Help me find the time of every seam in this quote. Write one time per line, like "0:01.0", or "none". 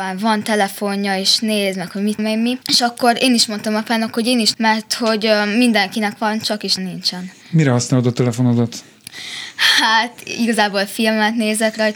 0:02.2
0:02.6
0:04.5
0:06.8